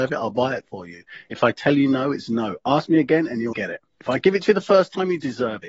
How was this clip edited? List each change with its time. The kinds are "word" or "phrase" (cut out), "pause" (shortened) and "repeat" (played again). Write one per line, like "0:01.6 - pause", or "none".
0:03.5 - word
0:03.9 - pause